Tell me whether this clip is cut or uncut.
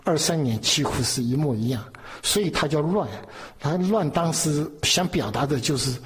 uncut